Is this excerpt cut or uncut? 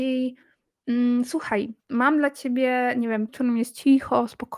cut